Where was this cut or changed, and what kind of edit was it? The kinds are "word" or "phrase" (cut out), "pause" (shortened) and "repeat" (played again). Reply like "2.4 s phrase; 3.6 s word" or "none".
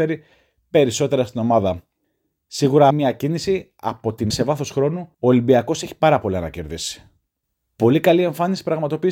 2.9 s word; 4.3 s word; 5.1 s pause